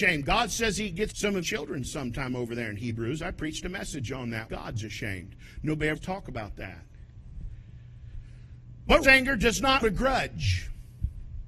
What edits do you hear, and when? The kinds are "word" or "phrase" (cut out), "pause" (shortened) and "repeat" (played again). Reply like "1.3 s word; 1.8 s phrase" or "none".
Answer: 1.1 s word; 1.4 s word; 4.5 s word; 6.0 s word; 9.0 s word; 9.8 s word